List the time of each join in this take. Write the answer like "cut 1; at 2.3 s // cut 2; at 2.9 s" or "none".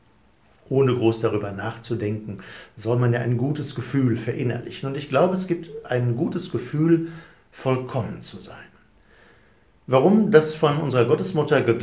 none

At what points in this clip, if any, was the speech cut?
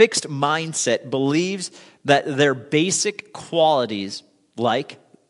none

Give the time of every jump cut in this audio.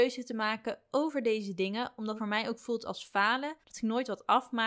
cut 1; at 2.2 s // cut 2; at 3.6 s

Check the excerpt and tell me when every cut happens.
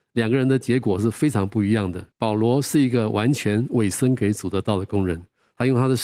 cut 1; at 2.1 s

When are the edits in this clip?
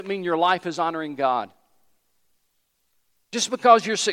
none

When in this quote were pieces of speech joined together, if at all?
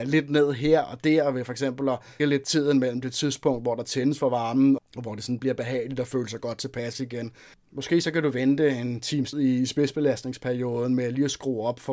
cut 1; at 2.2 s // cut 2; at 4.8 s // cut 3; at 9.3 s

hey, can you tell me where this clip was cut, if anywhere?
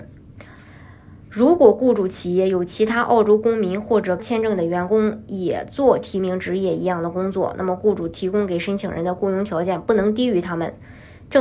cut 1; at 4.2 s

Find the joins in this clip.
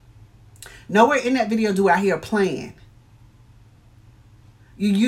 none

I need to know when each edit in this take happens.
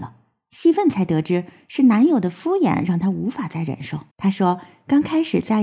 cut 1; at 4.1 s

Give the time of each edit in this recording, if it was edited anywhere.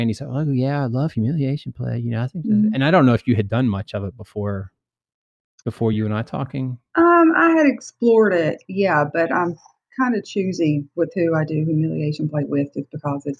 none

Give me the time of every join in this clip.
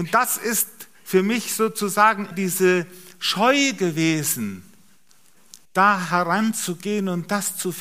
cut 1; at 2.3 s // cut 2; at 5.6 s

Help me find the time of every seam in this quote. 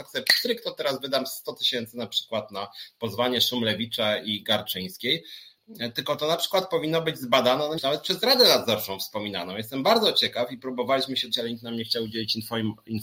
cut 1; at 7.8 s // cut 2; at 11.3 s

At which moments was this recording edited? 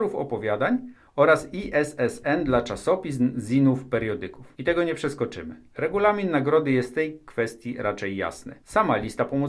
cut 1; at 4.5 s // cut 2; at 8.6 s

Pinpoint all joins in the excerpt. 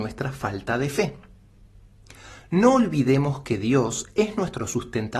none

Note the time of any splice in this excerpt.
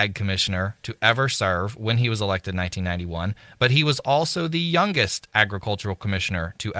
none

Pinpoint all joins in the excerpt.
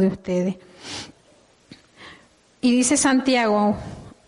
none

